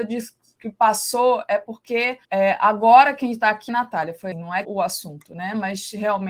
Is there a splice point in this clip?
yes; 4 cuts; at 2.2 s, 3.7 s, 4.3 s, 4.6 s

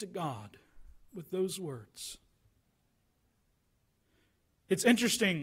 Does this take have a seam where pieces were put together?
no; 0 cuts

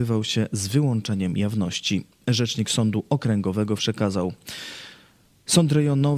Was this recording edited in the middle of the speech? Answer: yes; 1 cut; at 3.8 s

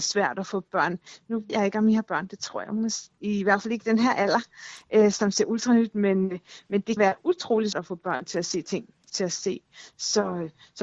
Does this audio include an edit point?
yes; 4 cuts; at 1.5 s, 7.0 s, 7.7 s, 9.1 s

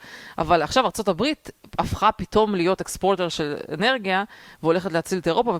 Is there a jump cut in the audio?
yes; 1 cut; at 3.3 s

